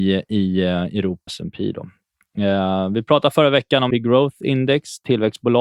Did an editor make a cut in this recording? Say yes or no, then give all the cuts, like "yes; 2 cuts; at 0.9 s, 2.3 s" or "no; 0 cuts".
yes; 2 cuts; at 1.3 s, 3.9 s